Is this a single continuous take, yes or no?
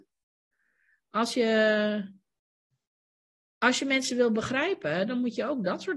yes